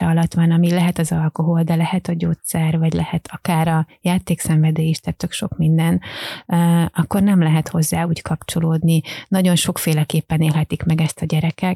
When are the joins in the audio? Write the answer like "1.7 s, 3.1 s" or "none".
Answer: none